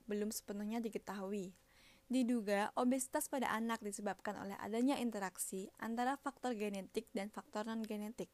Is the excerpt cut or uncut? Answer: uncut